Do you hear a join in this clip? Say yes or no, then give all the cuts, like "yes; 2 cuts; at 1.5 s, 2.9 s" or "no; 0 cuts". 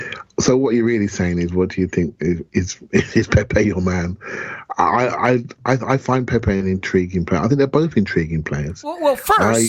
no; 0 cuts